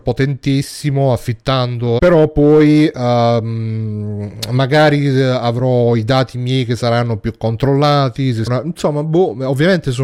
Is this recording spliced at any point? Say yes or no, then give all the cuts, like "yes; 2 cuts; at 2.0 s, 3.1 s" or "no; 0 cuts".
yes; 2 cuts; at 2.0 s, 8.5 s